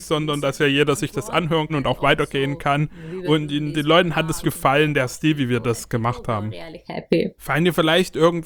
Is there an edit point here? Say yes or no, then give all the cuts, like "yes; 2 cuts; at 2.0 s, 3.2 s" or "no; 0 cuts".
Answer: yes; 3 cuts; at 1.7 s, 4.4 s, 7.4 s